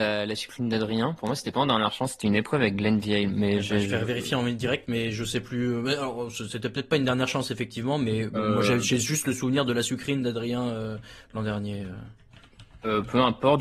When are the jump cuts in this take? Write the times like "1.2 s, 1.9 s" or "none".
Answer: none